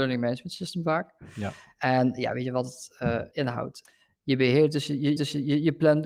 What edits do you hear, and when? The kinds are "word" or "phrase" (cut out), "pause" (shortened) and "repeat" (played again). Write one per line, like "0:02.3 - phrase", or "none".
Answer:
0:03.3 - word
0:05.2 - repeat